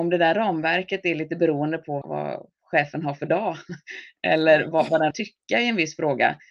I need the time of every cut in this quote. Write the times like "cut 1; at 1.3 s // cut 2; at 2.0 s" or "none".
cut 1; at 2.0 s // cut 2; at 4.7 s // cut 3; at 5.1 s